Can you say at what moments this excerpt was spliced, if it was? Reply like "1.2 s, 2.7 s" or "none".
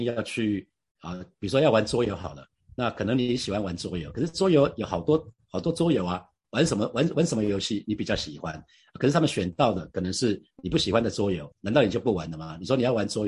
11.5 s